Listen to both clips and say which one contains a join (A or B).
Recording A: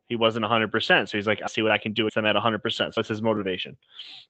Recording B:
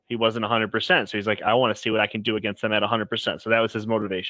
A